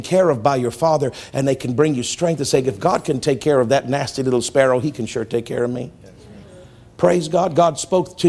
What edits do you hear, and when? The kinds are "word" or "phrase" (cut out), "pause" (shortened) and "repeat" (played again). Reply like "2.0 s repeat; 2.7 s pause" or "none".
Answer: none